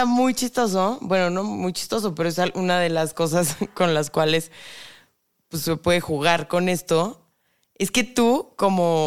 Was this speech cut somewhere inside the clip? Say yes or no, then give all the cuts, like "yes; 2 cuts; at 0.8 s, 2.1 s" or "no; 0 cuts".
no; 0 cuts